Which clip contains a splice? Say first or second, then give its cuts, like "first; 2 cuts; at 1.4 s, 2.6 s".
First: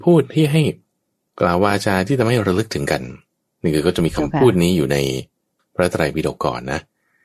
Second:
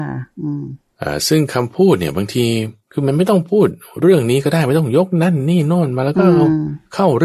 second; 2 cuts; at 2.8 s, 3.9 s